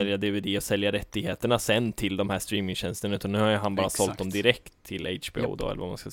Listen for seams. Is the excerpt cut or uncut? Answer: uncut